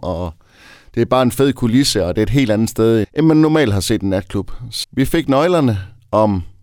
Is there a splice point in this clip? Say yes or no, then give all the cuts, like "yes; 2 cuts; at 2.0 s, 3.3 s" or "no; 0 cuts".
yes; 2 cuts; at 3.0 s, 4.8 s